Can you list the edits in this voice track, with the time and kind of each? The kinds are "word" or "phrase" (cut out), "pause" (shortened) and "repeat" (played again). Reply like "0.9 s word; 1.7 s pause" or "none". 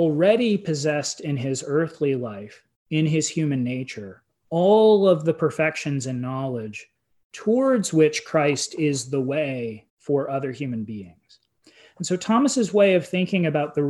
4.3 s pause; 9.9 s pause